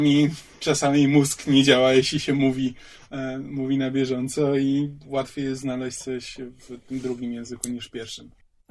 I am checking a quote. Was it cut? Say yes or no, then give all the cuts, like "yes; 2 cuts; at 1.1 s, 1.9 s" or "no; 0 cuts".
no; 0 cuts